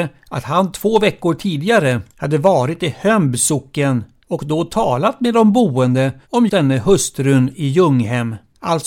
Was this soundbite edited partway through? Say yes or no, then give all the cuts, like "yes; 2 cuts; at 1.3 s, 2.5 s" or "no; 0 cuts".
yes; 1 cut; at 6.5 s